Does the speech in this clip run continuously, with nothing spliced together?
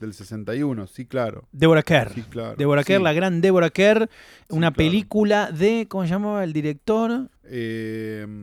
no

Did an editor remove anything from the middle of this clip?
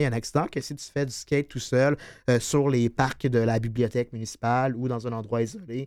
no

